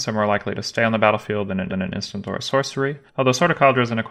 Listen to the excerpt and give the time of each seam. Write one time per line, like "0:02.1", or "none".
0:01.7
0:03.1